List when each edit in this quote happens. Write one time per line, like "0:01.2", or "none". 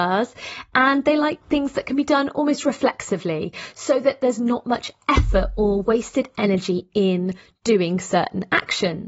none